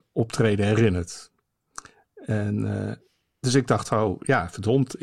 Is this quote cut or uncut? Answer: uncut